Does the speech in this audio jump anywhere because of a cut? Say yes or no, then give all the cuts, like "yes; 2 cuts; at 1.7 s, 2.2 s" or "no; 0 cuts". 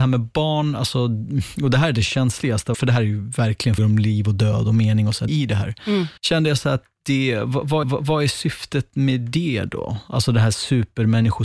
yes; 5 cuts; at 2.7 s, 3.8 s, 5.3 s, 6.2 s, 7.8 s